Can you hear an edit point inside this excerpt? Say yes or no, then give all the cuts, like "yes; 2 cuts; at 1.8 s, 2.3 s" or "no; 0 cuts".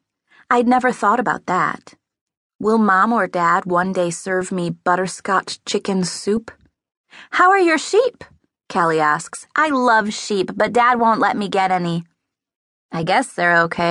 no; 0 cuts